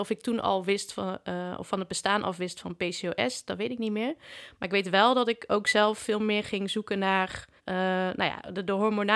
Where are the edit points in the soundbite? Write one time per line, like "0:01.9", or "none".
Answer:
0:07.6